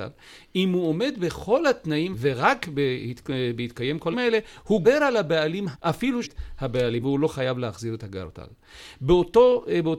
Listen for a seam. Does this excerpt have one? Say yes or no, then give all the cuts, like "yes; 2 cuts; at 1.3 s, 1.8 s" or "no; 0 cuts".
yes; 6 cuts; at 2.1 s, 4.1 s, 4.8 s, 5.7 s, 6.2 s, 7.0 s